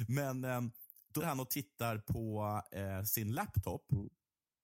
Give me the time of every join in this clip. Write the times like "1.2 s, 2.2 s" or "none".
1.2 s